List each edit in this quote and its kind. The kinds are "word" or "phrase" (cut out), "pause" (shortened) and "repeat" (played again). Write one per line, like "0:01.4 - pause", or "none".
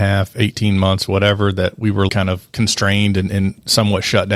0:02.1 - word